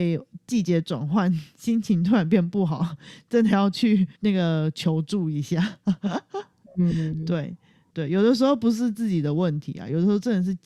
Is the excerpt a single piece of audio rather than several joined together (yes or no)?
no